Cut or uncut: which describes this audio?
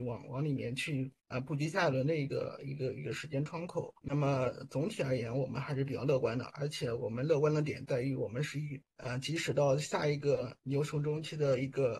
cut